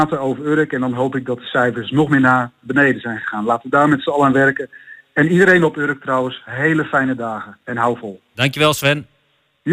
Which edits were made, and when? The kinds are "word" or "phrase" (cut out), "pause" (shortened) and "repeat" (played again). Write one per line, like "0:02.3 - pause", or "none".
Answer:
none